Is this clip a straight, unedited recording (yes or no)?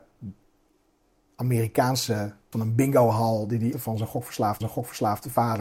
no